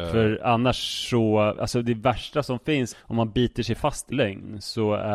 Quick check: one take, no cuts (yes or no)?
no